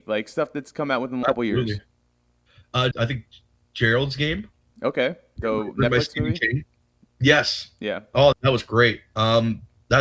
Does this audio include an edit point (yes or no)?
yes